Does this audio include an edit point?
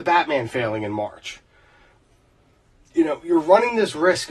no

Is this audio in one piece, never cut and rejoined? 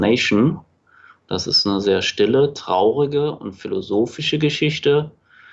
yes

